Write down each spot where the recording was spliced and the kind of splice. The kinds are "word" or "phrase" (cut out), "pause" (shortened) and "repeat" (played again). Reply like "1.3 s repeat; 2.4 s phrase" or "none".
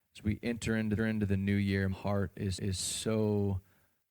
1.0 s repeat; 1.9 s word; 2.5 s repeat